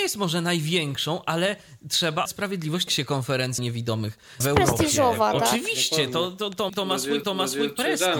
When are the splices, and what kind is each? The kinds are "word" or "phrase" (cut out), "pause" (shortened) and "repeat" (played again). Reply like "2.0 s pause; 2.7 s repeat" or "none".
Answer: 2.3 s word; 2.9 s phrase; 3.6 s word; 4.4 s phrase; 6.7 s phrase; 7.2 s repeat